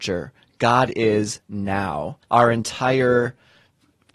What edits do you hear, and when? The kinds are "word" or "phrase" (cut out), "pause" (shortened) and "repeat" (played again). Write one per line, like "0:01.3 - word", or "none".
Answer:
0:02.2 - pause